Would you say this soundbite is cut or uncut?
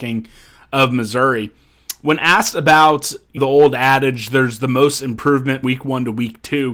cut